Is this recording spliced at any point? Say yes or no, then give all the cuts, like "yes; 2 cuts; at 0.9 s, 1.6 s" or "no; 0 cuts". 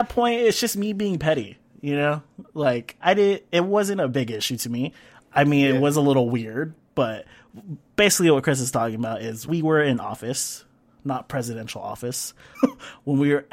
yes; 3 cuts; at 3.0 s, 9.5 s, 12.5 s